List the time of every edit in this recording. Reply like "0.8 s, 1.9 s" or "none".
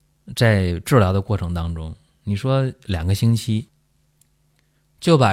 none